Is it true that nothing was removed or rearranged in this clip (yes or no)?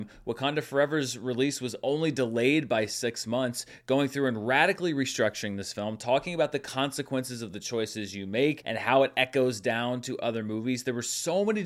yes